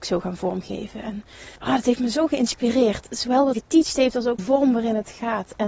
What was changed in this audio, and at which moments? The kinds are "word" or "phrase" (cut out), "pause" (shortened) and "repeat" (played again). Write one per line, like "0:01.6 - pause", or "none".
0:01.6 - pause
0:03.5 - word
0:04.4 - word